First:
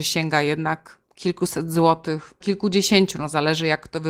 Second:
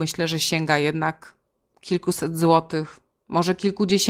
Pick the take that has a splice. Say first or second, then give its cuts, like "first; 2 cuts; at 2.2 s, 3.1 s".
first; 2 cuts; at 1.0 s, 2.4 s